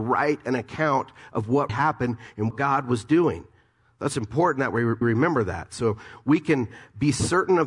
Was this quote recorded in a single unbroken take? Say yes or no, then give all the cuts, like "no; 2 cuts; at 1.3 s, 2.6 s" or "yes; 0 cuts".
no; 3 cuts; at 1.7 s, 2.5 s, 5.0 s